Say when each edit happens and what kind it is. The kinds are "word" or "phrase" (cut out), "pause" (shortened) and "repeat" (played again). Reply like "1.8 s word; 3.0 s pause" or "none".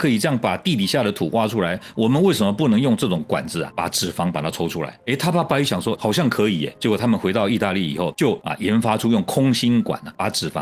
6.0 s word